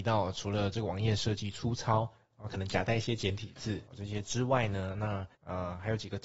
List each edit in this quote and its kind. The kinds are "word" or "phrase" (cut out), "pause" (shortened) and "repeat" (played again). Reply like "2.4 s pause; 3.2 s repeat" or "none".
3.9 s pause